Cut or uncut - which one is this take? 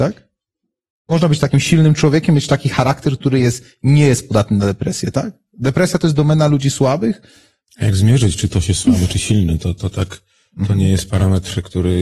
uncut